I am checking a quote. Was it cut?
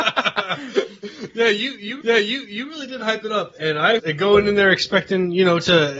yes; 2 cuts; at 2.0 s, 4.0 s

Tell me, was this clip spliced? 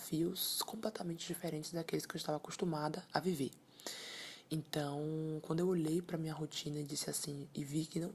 no; 0 cuts

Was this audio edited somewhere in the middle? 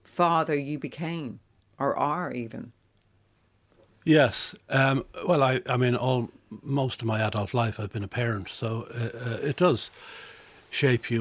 no; 0 cuts

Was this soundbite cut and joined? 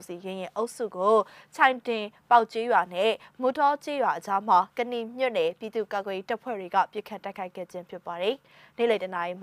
no; 0 cuts

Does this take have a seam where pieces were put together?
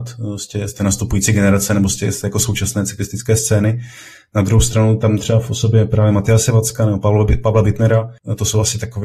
no; 0 cuts

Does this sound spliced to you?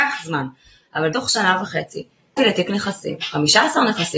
yes; 2 cuts; at 1.1 s, 2.4 s

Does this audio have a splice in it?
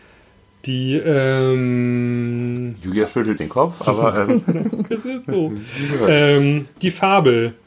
yes; 2 cuts; at 3.4 s, 4.9 s

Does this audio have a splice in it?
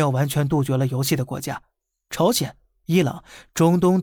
no; 0 cuts

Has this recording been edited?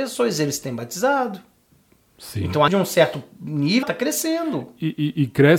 yes; 2 cuts; at 2.7 s, 3.8 s

